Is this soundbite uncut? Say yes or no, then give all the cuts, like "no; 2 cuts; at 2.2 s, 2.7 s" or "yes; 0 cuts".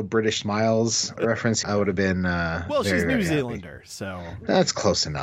no; 2 cuts; at 1.2 s, 1.6 s